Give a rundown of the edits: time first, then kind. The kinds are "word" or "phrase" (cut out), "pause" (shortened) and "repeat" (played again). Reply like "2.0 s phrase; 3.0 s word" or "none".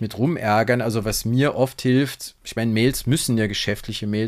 none